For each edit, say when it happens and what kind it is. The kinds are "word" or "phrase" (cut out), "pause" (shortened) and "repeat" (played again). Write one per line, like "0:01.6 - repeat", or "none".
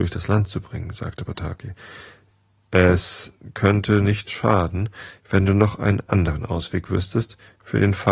none

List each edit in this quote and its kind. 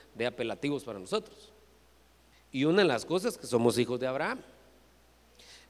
none

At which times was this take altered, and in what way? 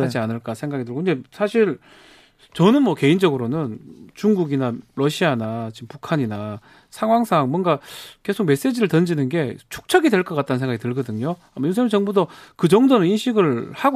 none

